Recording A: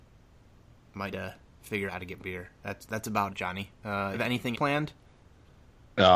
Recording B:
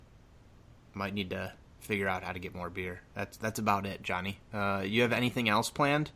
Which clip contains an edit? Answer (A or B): A